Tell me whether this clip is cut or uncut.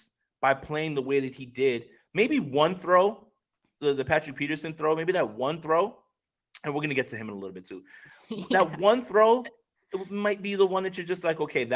uncut